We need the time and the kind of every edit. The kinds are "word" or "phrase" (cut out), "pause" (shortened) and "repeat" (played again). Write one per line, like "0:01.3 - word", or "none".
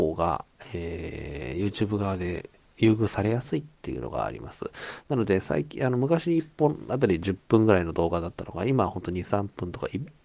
none